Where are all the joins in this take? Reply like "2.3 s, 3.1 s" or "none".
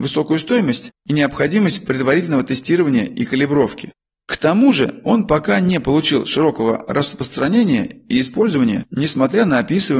none